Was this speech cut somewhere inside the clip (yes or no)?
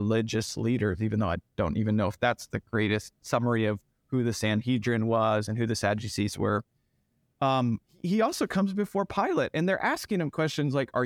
no